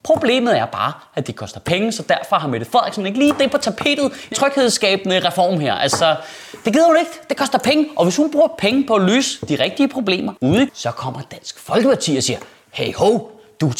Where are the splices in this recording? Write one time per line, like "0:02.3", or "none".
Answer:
0:04.3
0:10.4
0:10.7

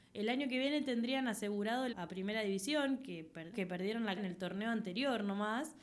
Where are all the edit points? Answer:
0:01.9
0:03.5
0:04.2

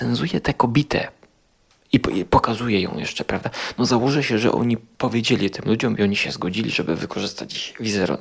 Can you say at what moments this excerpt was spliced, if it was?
none

